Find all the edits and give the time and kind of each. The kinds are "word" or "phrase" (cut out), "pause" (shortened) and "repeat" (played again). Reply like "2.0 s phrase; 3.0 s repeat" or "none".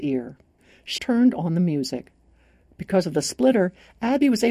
1.0 s word